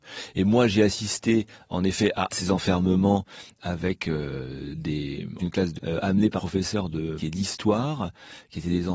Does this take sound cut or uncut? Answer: cut